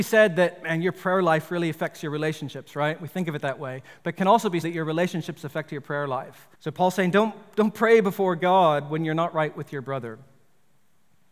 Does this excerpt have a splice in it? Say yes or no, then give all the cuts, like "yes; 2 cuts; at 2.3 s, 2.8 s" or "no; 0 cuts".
yes; 2 cuts; at 4.6 s, 6.5 s